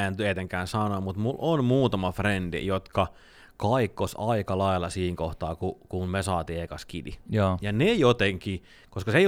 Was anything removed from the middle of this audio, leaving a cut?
no; 0 cuts

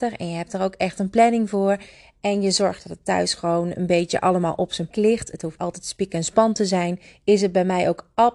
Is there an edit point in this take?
yes; 2 cuts; at 4.9 s, 5.6 s

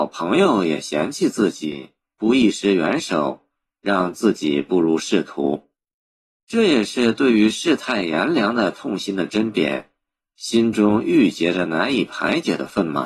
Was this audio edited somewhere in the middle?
no; 0 cuts

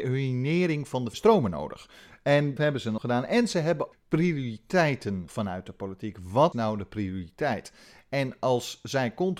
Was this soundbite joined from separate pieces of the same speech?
yes; 6 cuts; at 1.1 s, 2.6 s, 3.0 s, 3.9 s, 5.3 s, 6.5 s

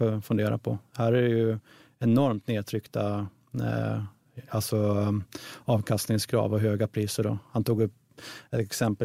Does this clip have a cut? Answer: no; 0 cuts

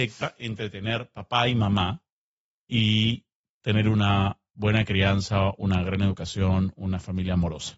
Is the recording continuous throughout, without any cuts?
yes; 0 cuts

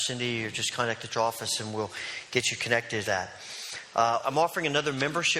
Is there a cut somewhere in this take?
yes; 3 cuts; at 1.1 s, 3.0 s, 4.2 s

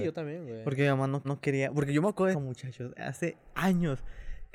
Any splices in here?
yes; 2 cuts; at 1.2 s, 2.3 s

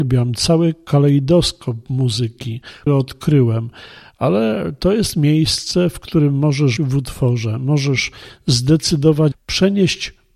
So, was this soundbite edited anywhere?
yes; 3 cuts; at 2.9 s, 6.8 s, 9.3 s

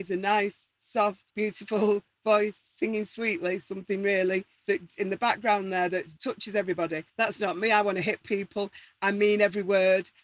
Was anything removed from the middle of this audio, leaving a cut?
yes; 4 cuts; at 1.3 s, 4.6 s, 6.2 s, 7.1 s

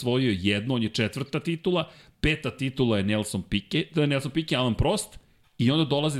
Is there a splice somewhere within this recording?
no; 0 cuts

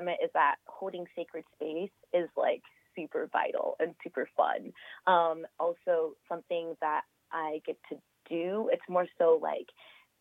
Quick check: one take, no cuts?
no; 2 cuts; at 5.5 s, 6.2 s

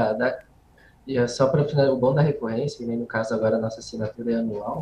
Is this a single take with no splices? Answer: yes; 0 cuts

